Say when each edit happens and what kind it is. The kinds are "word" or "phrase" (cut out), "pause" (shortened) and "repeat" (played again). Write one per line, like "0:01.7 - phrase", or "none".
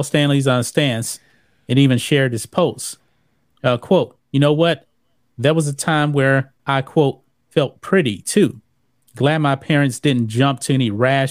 0:06.6 - pause